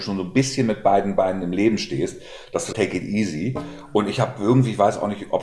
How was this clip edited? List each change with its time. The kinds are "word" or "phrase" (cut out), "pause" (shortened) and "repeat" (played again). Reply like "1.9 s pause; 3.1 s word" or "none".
2.7 s phrase